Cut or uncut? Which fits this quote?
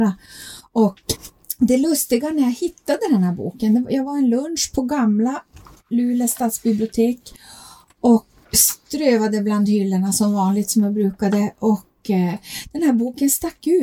uncut